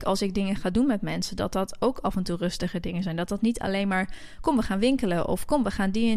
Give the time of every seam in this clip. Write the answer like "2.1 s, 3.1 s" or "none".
none